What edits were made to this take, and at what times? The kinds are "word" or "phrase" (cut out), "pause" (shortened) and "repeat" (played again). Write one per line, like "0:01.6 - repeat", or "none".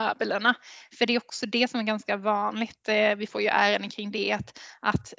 none